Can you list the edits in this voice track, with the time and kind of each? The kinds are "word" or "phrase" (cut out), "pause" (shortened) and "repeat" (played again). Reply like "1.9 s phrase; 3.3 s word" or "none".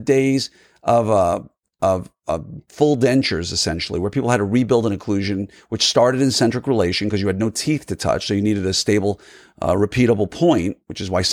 none